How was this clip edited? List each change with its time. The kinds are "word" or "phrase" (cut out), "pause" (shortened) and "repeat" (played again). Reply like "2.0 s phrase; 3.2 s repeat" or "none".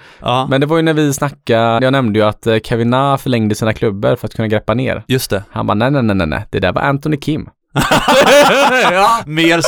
1.8 s word